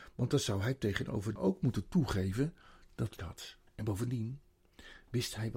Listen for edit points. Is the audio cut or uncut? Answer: cut